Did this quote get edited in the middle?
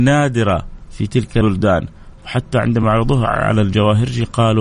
no; 0 cuts

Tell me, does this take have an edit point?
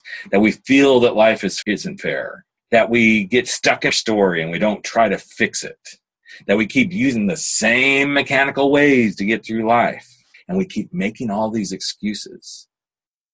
yes; 4 cuts; at 1.6 s, 2.6 s, 3.9 s, 10.3 s

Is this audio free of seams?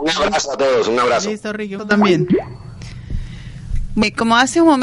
no; 1 cut; at 1.8 s

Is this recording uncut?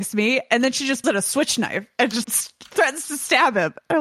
no; 2 cuts; at 1.0 s, 2.2 s

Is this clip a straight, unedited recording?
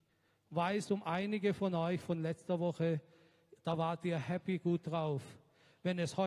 yes; 0 cuts

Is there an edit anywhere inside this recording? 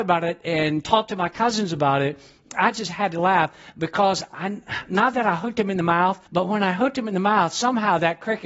yes; 1 cut; at 6.3 s

